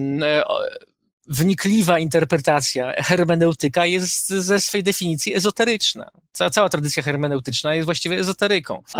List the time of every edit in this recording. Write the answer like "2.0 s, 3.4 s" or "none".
none